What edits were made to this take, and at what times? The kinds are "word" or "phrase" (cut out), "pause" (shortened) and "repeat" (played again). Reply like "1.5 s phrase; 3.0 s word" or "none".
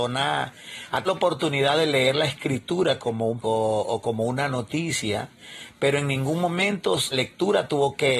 1.1 s word; 3.4 s word; 7.1 s word